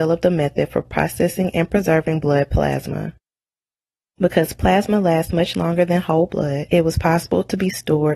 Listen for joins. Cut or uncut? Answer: uncut